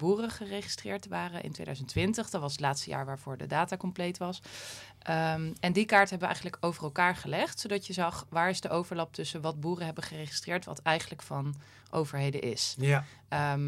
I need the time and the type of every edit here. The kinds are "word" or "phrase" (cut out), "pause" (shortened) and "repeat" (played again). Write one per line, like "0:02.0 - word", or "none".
none